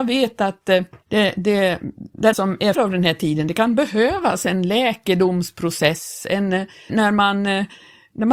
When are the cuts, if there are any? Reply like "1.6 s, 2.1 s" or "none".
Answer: 1.0 s, 2.3 s, 2.7 s, 6.9 s